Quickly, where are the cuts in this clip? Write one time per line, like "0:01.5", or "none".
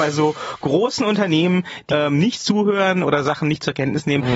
0:01.9
0:03.0